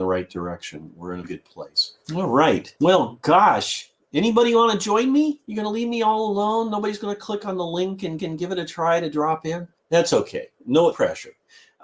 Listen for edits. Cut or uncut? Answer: cut